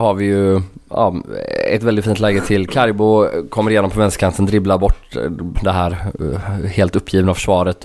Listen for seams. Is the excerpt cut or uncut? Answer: cut